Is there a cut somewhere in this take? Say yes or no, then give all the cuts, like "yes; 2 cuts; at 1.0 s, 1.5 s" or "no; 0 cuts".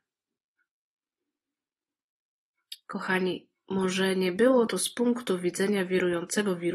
no; 0 cuts